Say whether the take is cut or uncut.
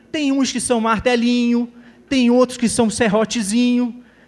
uncut